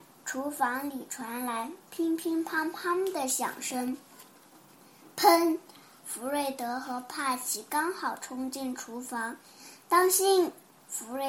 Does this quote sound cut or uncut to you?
uncut